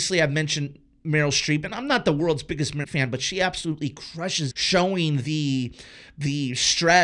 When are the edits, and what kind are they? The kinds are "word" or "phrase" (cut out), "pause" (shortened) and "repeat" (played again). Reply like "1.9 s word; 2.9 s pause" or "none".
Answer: 1.7 s word; 2.8 s word; 4.5 s phrase